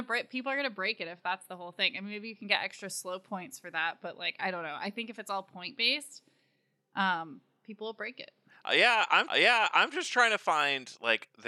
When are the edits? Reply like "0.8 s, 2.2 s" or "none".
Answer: 9.3 s